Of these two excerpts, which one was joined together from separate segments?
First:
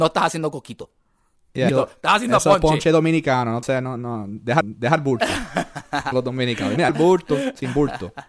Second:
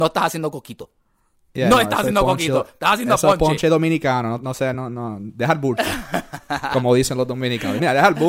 first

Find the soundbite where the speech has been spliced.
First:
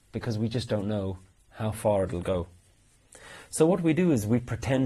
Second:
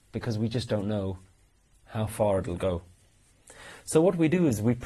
first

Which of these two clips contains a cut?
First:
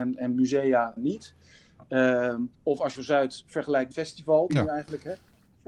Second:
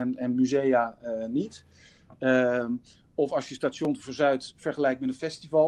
first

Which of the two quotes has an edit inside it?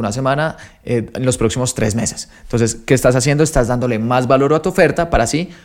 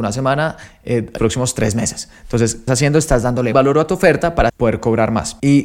second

